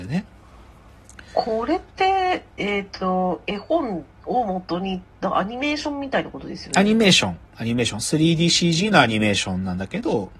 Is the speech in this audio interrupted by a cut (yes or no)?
yes